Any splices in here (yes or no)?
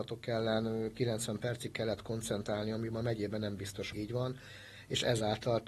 yes